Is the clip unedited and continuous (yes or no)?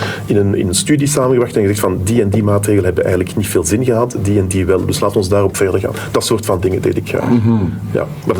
yes